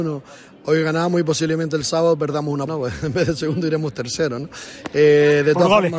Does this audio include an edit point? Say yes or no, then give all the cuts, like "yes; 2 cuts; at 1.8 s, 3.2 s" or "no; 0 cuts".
yes; 1 cut; at 2.7 s